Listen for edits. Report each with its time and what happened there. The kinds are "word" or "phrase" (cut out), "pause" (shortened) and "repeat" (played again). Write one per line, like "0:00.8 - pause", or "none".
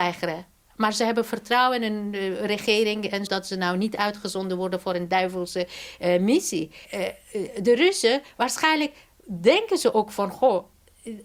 0:03.3 - word
0:06.8 - pause